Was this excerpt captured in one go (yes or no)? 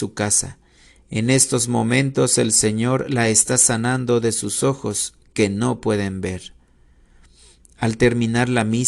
yes